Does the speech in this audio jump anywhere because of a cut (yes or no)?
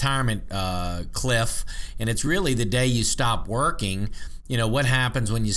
no